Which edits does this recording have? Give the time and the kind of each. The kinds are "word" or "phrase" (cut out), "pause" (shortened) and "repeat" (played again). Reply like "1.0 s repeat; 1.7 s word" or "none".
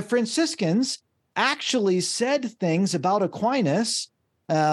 none